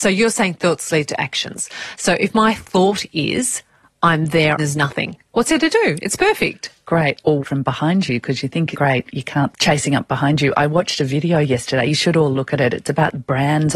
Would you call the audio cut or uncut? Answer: cut